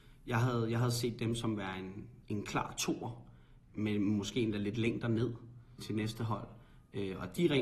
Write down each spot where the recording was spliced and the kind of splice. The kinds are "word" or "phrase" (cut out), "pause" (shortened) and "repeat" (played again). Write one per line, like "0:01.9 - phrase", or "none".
0:02.2 - pause
0:03.7 - word
0:05.8 - word